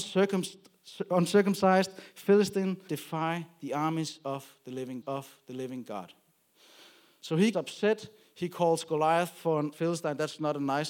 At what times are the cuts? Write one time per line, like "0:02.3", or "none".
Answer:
0:02.9
0:05.0
0:07.5
0:09.7